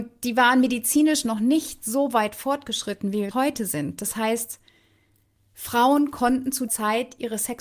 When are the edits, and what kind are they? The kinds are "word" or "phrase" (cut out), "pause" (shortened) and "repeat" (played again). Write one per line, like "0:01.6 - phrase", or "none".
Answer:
0:03.3 - word
0:06.7 - word